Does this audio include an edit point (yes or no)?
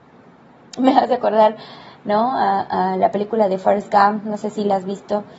no